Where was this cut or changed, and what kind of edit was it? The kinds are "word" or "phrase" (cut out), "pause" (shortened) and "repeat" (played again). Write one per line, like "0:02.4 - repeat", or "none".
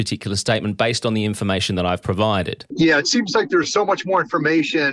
none